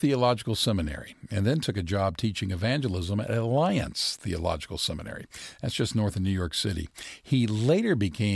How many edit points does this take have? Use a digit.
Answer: 0